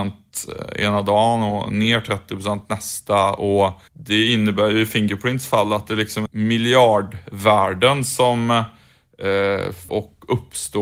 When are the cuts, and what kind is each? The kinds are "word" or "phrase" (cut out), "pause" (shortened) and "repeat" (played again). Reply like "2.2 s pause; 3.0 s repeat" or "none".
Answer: 3.9 s pause; 6.3 s word; 9.9 s word